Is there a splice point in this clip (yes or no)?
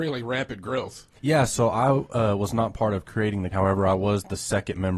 yes